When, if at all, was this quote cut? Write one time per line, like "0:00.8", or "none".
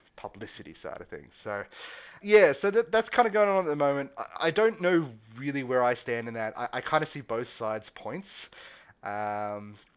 0:02.2